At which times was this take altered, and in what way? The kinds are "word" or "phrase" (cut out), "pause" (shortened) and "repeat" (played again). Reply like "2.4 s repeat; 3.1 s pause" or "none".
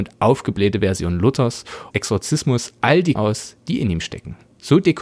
1.9 s phrase; 3.2 s phrase